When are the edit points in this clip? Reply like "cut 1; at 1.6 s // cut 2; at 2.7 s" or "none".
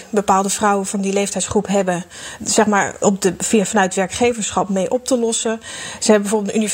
cut 1; at 2.4 s // cut 2; at 3.0 s